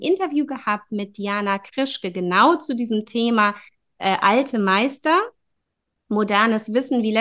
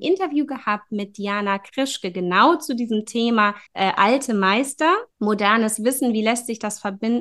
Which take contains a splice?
second; 2 cuts; at 3.7 s, 5.1 s

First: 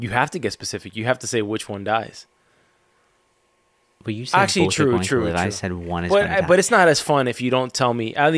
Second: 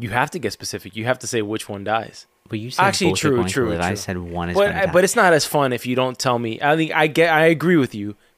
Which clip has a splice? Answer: second; 1 cut; at 2.4 s

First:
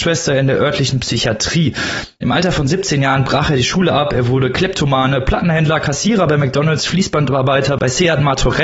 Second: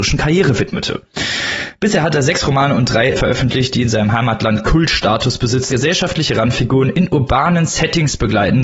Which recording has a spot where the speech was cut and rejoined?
second; 2 cuts; at 3.1 s, 5.7 s

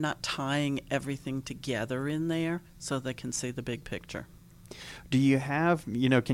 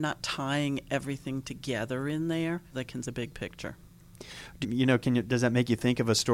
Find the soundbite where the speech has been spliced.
second; 3 cuts; at 2.7 s, 3.0 s, 4.6 s

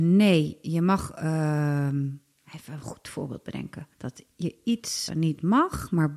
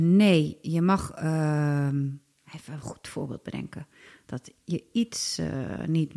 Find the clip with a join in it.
first; 2 cuts; at 3.9 s, 5.1 s

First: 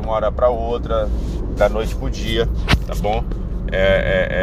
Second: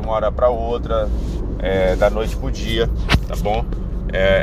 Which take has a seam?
first; 1 cut; at 1.6 s

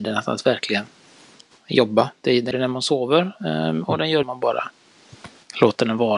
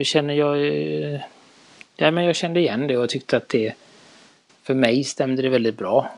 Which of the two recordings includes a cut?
first; 2 cuts; at 2.5 s, 4.2 s

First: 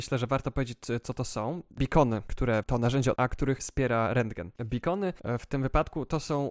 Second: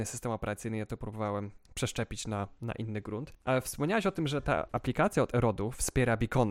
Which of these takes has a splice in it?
first; 3 cuts; at 2.6 s, 3.2 s, 3.6 s

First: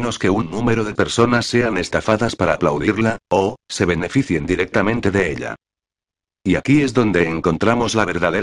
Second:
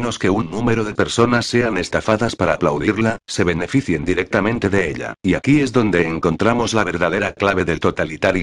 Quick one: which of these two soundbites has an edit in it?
second; 2 cuts; at 3.2 s, 5.2 s

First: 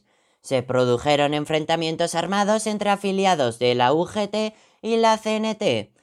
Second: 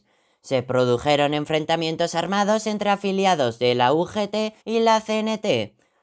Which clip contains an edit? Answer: second; 1 cut; at 4.6 s

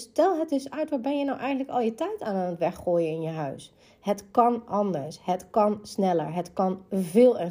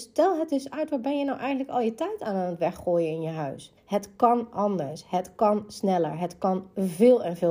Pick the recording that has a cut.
second; 1 cut; at 3.8 s

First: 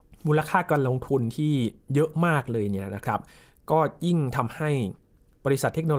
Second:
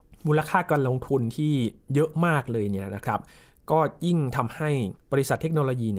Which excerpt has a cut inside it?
second; 1 cut; at 5.0 s

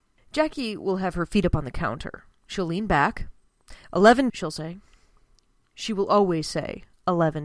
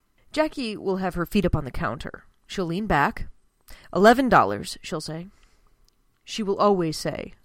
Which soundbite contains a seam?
first; 1 cut; at 4.3 s

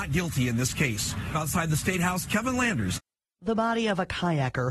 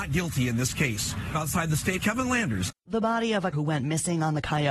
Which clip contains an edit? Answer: second; 3 cuts; at 2.0 s, 2.8 s, 3.5 s

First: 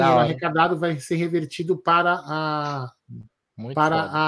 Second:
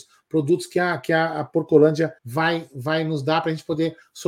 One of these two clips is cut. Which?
second; 1 cut; at 2.2 s

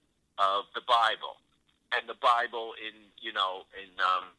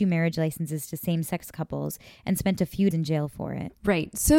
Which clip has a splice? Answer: second; 1 cut; at 2.9 s

